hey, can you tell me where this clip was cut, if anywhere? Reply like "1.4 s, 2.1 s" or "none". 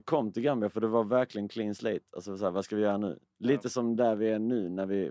none